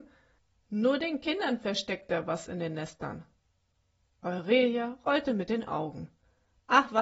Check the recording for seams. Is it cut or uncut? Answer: uncut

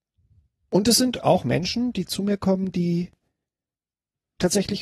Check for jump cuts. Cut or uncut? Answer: uncut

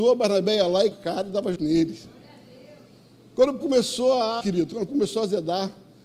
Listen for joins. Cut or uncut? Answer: cut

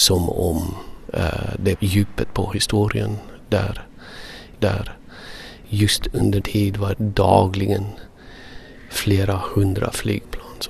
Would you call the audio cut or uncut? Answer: cut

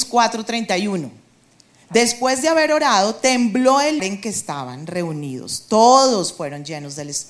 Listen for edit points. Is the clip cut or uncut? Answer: cut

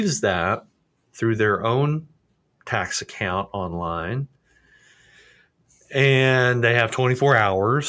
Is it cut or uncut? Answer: uncut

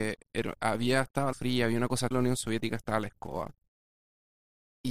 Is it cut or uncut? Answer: cut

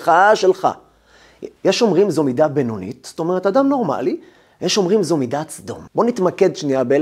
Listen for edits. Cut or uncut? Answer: cut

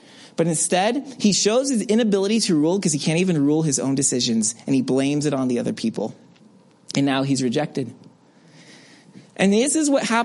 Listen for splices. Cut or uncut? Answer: uncut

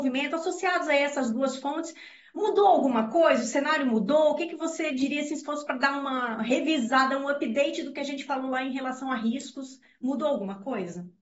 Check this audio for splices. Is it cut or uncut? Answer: uncut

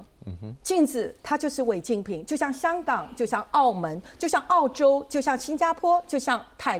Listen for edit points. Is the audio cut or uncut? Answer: cut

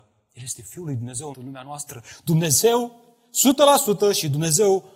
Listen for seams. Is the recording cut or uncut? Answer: cut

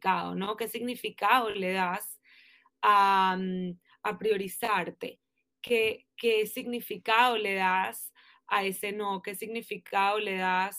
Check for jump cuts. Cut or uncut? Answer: uncut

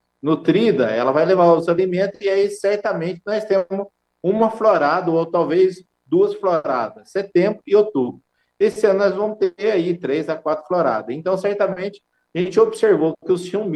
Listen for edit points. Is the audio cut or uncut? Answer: uncut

